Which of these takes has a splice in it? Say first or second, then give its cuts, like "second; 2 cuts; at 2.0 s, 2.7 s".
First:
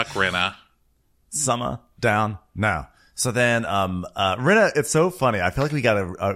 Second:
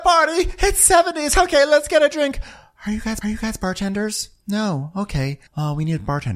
second; 2 cuts; at 3.2 s, 5.5 s